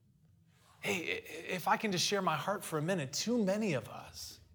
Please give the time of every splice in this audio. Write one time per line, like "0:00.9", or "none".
none